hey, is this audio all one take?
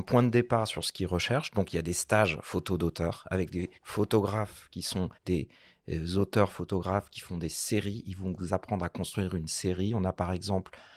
no; 2 cuts; at 3.8 s, 5.2 s

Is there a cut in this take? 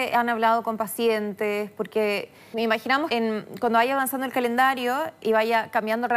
yes; 2 cuts; at 2.5 s, 3.1 s

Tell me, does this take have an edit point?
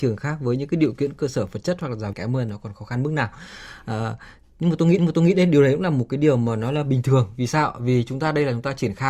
yes; 2 cuts; at 2.1 s, 5.0 s

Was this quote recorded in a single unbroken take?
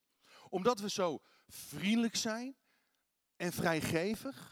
yes; 0 cuts

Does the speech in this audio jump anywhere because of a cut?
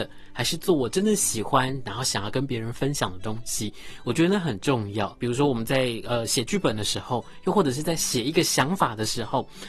no; 0 cuts

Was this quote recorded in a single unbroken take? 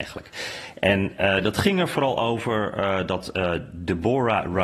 yes; 0 cuts

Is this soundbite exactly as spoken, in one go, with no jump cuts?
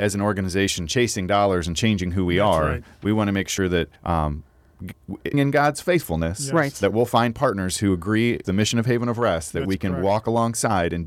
no; 3 cuts; at 4.0 s, 5.3 s, 8.4 s

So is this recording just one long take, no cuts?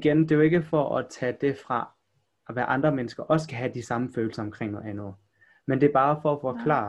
yes; 0 cuts

